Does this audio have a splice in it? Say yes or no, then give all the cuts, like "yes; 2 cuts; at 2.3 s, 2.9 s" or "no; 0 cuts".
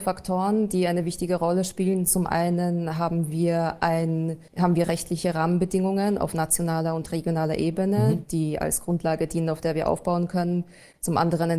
yes; 1 cut; at 4.5 s